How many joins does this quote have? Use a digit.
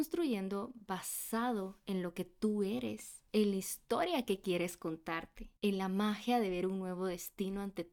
2